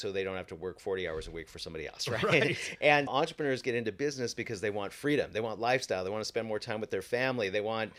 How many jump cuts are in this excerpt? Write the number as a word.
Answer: one